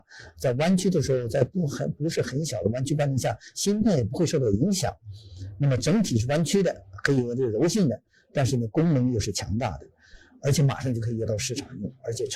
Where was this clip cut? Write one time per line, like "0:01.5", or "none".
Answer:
none